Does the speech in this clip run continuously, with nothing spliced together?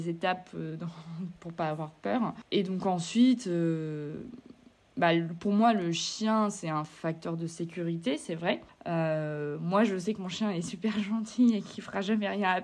yes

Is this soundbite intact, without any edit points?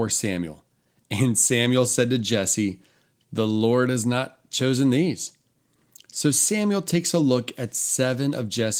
yes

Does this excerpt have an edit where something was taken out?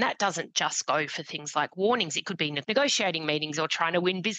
yes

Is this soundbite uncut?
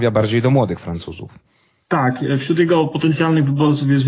yes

